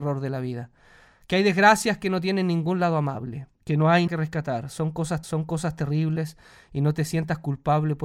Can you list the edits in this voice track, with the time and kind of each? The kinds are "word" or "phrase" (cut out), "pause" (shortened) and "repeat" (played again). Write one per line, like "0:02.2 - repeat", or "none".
0:03.5 - pause
0:04.1 - word
0:05.2 - repeat